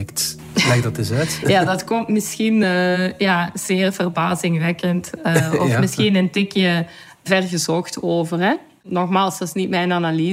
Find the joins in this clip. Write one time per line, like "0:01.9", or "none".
none